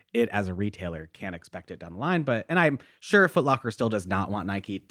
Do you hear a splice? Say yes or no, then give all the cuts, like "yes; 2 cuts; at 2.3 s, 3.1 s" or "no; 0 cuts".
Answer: no; 0 cuts